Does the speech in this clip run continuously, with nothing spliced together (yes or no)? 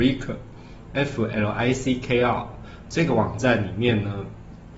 yes